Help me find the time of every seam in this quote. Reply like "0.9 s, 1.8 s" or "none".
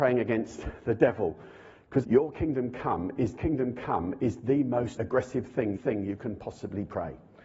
2.0 s, 3.4 s, 5.0 s, 5.8 s